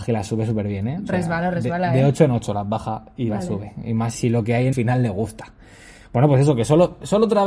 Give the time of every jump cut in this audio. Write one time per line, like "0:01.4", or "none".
0:04.1
0:04.7